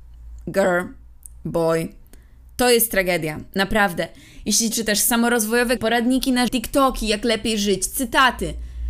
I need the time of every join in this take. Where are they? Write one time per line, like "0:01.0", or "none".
0:04.7
0:05.8
0:06.5